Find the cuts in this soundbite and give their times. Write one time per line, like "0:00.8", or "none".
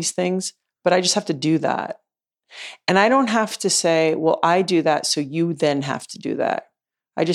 none